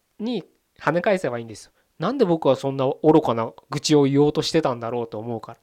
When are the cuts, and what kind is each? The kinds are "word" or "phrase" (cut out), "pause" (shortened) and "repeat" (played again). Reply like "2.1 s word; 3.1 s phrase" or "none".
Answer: none